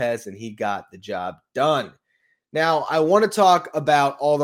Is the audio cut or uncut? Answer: uncut